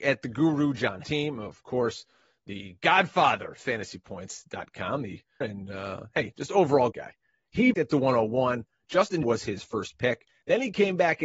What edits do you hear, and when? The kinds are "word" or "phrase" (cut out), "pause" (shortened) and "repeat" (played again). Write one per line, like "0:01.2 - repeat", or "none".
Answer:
0:01.0 - word
0:05.4 - word
0:06.9 - word
0:07.7 - word
0:09.2 - word